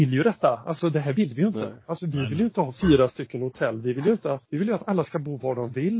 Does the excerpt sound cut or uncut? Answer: cut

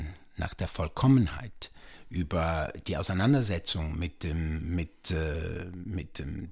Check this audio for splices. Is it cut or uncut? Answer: uncut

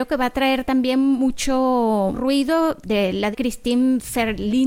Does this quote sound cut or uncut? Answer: cut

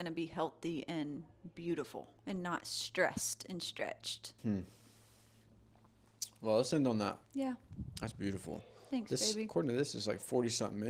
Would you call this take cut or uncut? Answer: cut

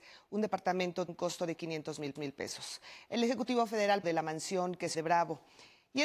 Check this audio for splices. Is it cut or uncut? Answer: cut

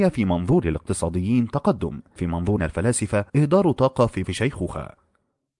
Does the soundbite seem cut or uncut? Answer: cut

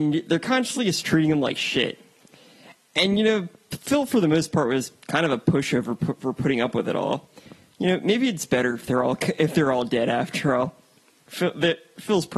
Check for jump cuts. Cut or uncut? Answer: uncut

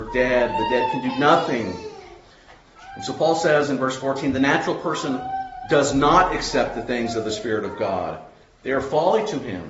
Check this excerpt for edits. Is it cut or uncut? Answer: uncut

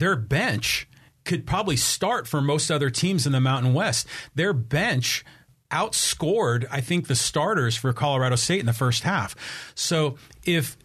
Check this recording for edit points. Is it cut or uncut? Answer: uncut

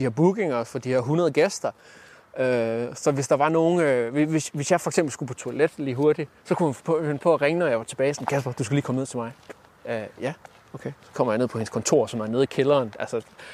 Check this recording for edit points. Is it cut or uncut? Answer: uncut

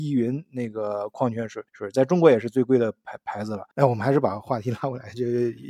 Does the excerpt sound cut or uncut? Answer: cut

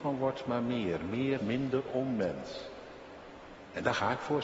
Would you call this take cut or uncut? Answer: cut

